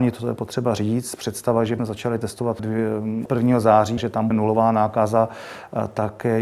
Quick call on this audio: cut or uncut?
cut